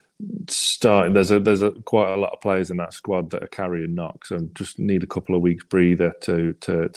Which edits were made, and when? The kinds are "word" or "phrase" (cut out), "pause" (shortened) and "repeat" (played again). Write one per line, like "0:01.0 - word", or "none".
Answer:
none